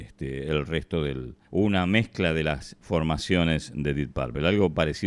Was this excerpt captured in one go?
no; 1 cut; at 1.4 s

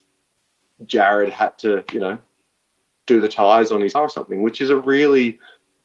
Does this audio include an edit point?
yes; 1 cut; at 3.9 s

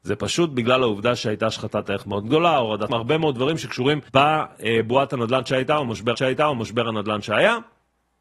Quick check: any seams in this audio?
yes; 3 cuts; at 2.9 s, 4.1 s, 6.1 s

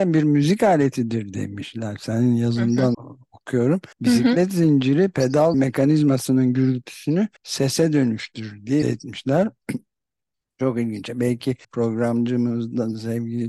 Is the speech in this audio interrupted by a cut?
yes; 6 cuts; at 2.9 s, 3.9 s, 5.5 s, 7.4 s, 8.8 s, 11.6 s

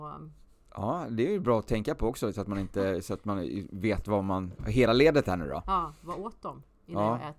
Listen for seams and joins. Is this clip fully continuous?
yes; 0 cuts

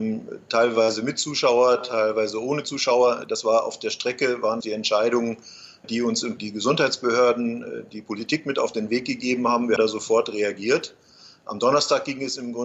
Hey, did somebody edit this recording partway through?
yes; 4 cuts; at 4.6 s, 5.8 s, 6.4 s, 9.8 s

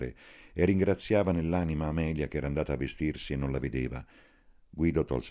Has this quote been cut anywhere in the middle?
no; 0 cuts

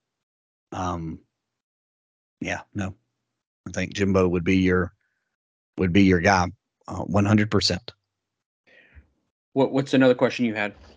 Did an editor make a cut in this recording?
no; 0 cuts

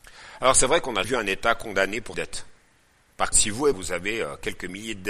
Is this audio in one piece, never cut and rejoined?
no; 4 cuts; at 1.0 s, 2.1 s, 3.3 s, 3.7 s

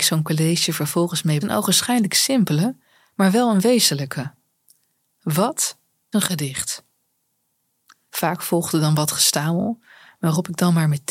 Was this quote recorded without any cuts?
no; 2 cuts; at 1.4 s, 6.1 s

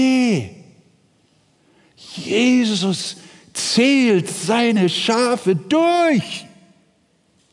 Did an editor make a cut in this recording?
no; 0 cuts

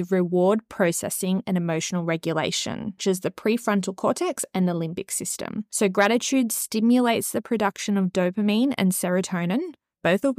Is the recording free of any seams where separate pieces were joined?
no; 1 cut; at 3.0 s

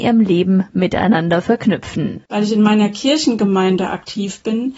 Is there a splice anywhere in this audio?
no; 0 cuts

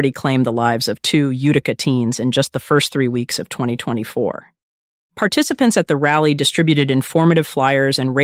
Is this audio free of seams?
yes; 0 cuts

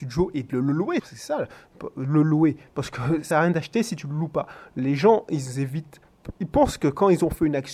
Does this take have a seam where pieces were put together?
yes; 3 cuts; at 1.0 s, 3.3 s, 6.4 s

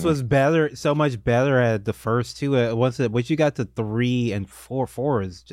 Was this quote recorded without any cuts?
yes; 0 cuts

